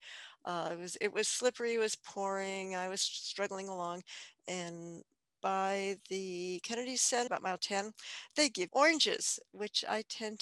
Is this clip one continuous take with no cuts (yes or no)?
no